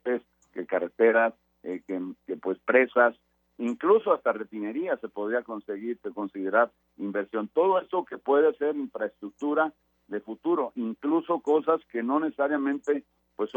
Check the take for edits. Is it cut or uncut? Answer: uncut